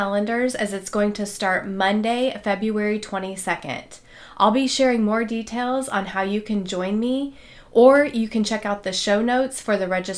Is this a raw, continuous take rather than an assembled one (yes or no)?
yes